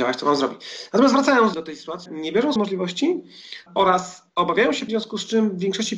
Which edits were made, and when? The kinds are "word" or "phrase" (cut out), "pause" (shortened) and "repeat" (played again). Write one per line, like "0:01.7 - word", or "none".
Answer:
0:01.5 - word
0:02.1 - word
0:02.6 - word
0:03.7 - word
0:04.9 - word